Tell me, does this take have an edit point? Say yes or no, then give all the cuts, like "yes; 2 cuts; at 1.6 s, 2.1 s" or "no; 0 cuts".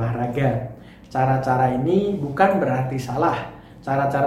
no; 0 cuts